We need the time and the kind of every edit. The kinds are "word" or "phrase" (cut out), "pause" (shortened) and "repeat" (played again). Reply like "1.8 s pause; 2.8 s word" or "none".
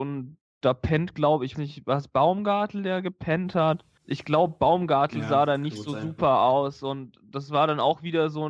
1.5 s word; 4.0 s pause